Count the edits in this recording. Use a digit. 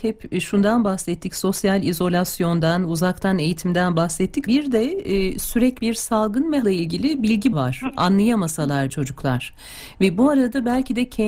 5